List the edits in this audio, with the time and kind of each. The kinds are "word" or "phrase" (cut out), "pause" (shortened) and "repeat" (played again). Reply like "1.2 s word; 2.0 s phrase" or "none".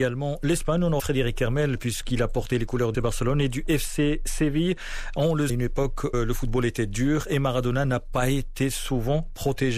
1.0 s phrase; 2.9 s word; 5.5 s phrase; 6.1 s word